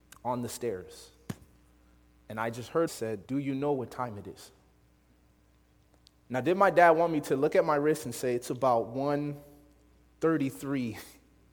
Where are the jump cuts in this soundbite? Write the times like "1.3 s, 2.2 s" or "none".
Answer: 2.9 s, 3.2 s